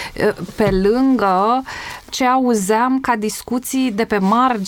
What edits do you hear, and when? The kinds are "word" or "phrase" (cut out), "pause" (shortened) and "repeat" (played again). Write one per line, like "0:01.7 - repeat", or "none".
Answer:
none